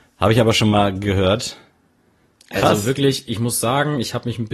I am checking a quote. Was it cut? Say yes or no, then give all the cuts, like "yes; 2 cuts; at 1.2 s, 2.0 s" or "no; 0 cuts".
no; 0 cuts